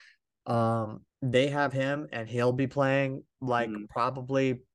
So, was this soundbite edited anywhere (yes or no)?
yes